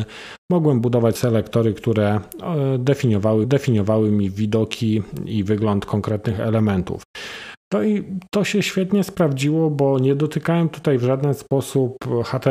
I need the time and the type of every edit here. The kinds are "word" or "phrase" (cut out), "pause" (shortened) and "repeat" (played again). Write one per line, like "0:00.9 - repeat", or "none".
0:01.2 - word
0:03.4 - repeat